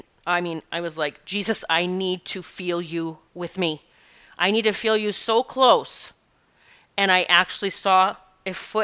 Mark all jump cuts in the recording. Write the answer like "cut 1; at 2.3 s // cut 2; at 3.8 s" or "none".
none